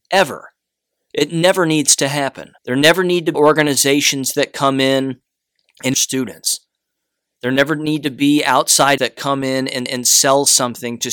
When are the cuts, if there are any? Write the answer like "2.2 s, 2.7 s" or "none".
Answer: 2.6 s, 3.3 s, 5.9 s, 9.0 s, 9.9 s